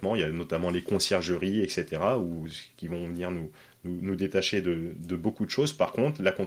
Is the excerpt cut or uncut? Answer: uncut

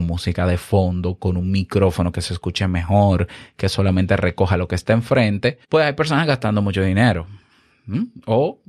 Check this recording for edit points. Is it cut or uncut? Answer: cut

